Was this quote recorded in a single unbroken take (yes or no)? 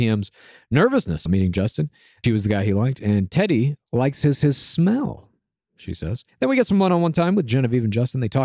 no